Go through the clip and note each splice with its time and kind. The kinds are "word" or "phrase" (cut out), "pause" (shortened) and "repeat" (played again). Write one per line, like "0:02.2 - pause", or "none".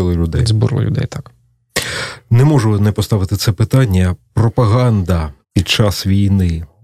0:05.4 - pause